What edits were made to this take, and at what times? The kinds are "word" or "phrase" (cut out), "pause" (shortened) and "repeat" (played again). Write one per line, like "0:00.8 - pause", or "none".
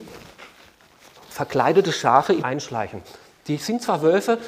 0:02.4 - phrase